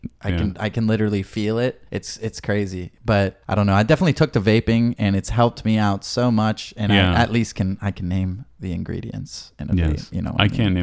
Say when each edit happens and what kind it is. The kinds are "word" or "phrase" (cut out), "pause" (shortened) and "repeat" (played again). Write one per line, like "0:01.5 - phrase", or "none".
0:01.9 - pause
0:03.4 - pause